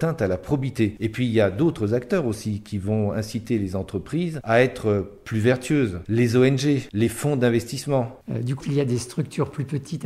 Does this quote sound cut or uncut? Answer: cut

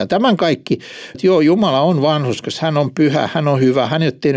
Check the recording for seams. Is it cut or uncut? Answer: cut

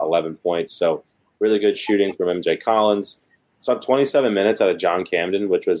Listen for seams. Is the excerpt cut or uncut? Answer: uncut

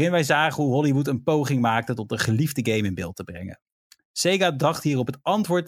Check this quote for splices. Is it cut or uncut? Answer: uncut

